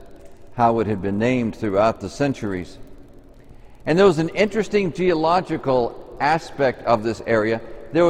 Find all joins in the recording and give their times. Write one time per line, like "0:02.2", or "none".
none